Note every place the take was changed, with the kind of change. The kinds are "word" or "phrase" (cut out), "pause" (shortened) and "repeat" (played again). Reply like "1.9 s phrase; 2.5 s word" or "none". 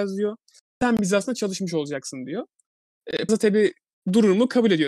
3.3 s word